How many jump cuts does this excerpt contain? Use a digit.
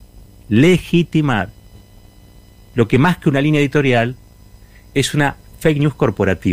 0